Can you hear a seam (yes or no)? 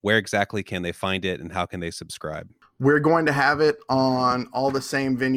no